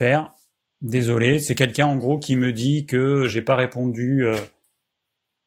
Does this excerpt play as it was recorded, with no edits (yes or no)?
yes